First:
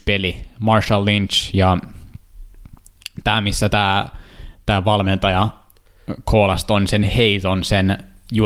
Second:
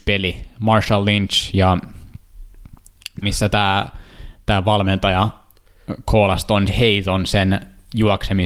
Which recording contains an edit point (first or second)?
second